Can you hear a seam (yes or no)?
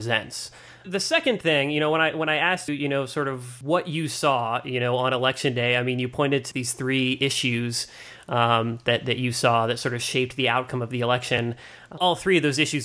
yes